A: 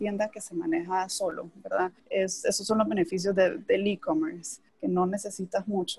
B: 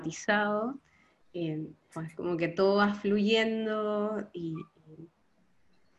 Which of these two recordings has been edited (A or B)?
A